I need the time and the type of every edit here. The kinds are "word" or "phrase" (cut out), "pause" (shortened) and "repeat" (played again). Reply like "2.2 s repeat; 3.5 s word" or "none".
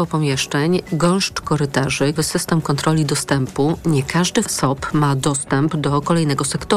2.2 s word; 4.4 s word